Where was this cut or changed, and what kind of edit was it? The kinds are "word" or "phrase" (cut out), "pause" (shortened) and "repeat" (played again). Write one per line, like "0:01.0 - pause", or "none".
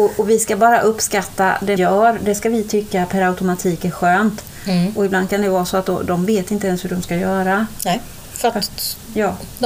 0:01.8 - word